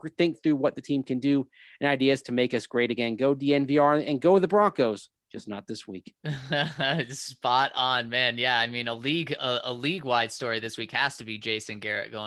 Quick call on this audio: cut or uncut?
uncut